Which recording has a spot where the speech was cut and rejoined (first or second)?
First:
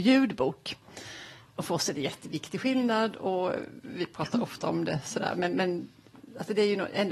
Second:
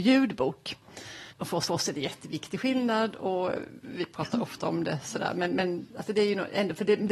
second